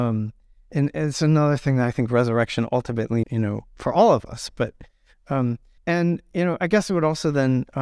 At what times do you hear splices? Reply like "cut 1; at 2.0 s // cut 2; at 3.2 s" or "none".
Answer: cut 1; at 3.2 s // cut 2; at 5.8 s